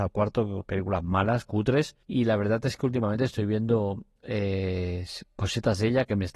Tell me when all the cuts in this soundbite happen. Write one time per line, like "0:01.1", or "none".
0:02.0